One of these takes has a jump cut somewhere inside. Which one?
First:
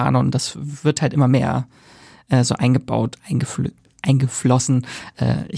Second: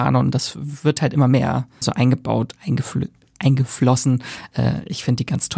second; 1 cut; at 1.8 s

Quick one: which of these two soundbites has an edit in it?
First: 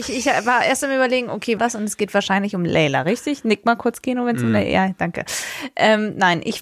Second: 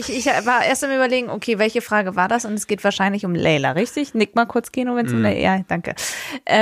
first; 1 cut; at 1.6 s

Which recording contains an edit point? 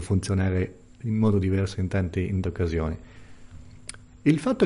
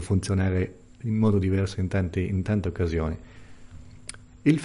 first; 1 cut; at 2.4 s

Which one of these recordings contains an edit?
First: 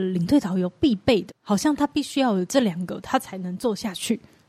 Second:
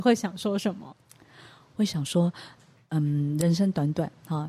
first; 1 cut; at 1.3 s

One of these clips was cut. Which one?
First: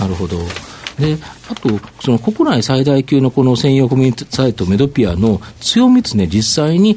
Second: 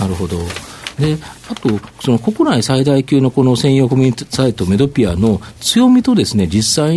first; 1 cut; at 6.1 s

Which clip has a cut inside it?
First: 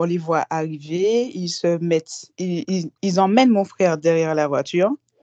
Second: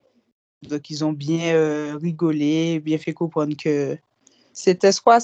first; 1 cut; at 3.0 s

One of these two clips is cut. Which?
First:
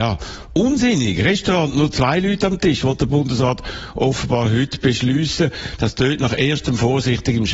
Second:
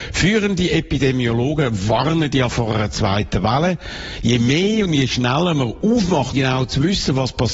second; 1 cut; at 6.3 s

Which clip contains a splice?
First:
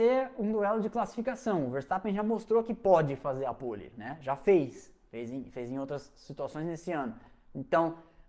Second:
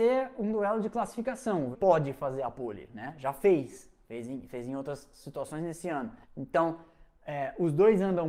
second; 2 cuts; at 1.7 s, 6.2 s

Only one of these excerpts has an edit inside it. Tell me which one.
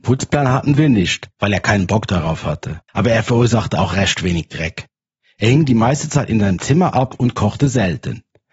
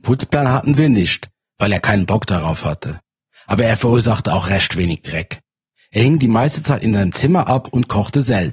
first; 2 cuts; at 1.3 s, 2.9 s

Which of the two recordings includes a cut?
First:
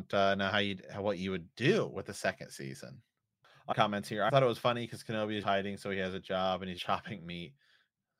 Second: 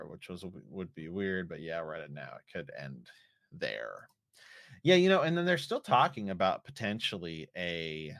first; 4 cuts; at 3.7 s, 4.3 s, 5.4 s, 6.8 s

